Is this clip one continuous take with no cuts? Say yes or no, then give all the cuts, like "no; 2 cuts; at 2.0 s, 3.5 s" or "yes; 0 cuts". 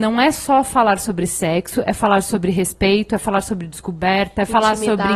yes; 0 cuts